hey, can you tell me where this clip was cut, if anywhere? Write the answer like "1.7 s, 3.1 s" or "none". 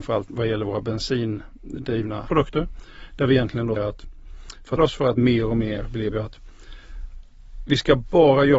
2.3 s, 3.8 s, 4.8 s, 6.1 s